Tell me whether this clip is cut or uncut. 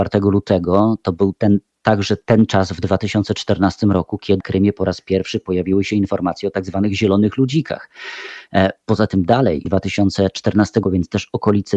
cut